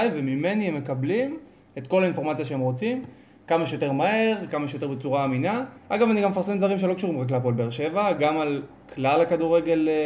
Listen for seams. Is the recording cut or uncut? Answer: cut